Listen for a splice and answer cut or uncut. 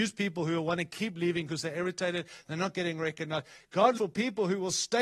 cut